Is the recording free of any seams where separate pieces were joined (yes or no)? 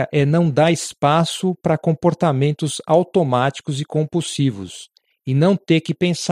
yes